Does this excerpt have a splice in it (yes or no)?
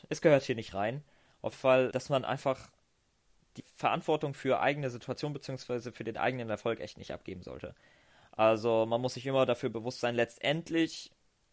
yes